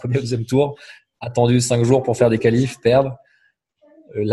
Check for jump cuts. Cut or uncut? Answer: uncut